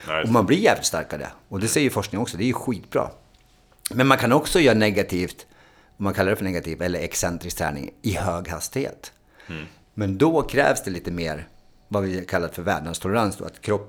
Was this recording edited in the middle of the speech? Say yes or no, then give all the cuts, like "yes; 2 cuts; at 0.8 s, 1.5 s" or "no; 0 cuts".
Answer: no; 0 cuts